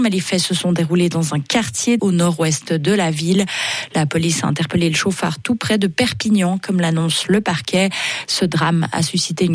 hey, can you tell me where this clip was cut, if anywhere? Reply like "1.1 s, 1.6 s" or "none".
2.0 s

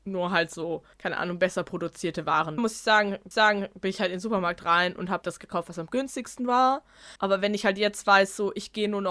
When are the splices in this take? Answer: 0.9 s, 2.6 s, 3.3 s, 5.2 s, 7.2 s

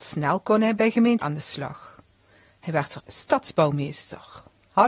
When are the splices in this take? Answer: 1.2 s, 3.0 s

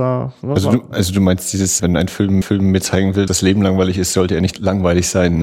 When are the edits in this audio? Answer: 1.8 s, 2.4 s, 3.3 s, 4.5 s

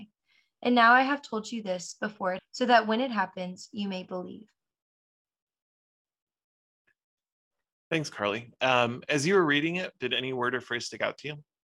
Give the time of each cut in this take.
2.4 s

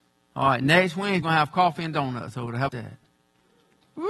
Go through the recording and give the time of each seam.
1.2 s, 2.7 s

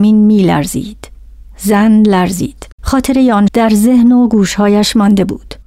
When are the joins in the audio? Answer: 2.7 s, 3.5 s

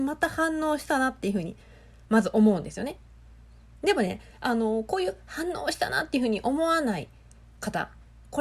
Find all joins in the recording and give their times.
none

